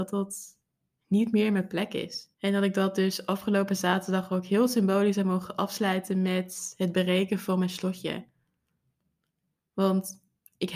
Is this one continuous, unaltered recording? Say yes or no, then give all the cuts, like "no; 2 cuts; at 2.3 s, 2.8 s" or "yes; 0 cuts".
no; 1 cut; at 2.3 s